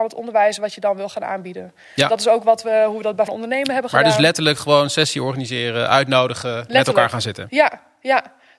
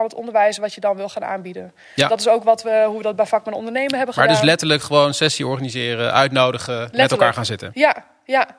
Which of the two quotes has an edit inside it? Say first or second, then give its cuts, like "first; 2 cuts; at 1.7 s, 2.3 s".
first; 1 cut; at 3.3 s